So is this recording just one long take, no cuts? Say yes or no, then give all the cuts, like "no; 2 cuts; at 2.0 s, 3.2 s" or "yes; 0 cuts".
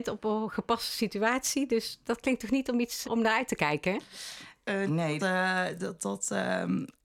no; 3 cuts; at 3.0 s, 4.9 s, 5.2 s